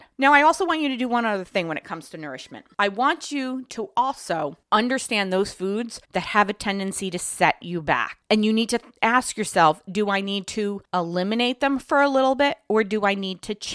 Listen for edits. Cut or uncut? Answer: cut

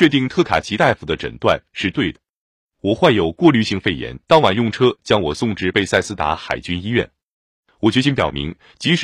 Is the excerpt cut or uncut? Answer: cut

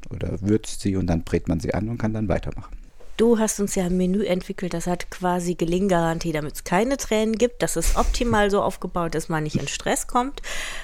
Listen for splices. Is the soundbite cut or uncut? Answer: uncut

